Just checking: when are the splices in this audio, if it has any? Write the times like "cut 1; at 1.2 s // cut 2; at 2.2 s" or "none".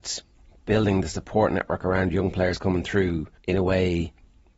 cut 1; at 3.4 s